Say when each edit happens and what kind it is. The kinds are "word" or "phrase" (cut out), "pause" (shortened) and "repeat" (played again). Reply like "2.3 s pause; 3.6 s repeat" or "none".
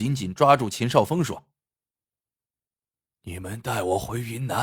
none